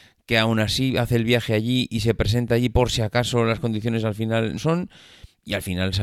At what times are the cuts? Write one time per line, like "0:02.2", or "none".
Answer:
0:04.6